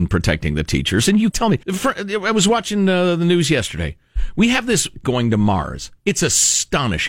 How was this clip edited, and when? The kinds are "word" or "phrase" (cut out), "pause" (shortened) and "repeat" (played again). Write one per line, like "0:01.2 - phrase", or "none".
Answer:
0:01.3 - word
0:01.6 - pause
0:05.0 - word
0:06.0 - pause